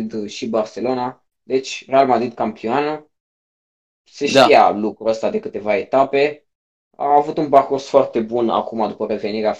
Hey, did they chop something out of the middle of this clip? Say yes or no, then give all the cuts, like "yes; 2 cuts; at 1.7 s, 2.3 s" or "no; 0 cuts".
no; 0 cuts